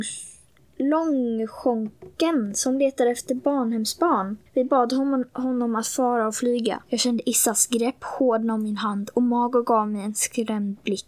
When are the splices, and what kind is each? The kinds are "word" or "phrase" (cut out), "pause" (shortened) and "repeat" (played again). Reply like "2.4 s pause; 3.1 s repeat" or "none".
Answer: 4.5 s pause; 6.9 s pause